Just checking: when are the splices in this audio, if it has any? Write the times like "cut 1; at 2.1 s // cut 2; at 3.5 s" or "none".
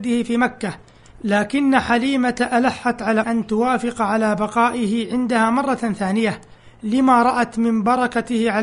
cut 1; at 3.2 s